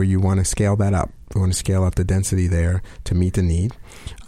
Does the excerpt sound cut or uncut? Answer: uncut